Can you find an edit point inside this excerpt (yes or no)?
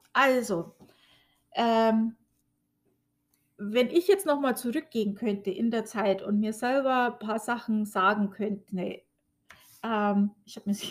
no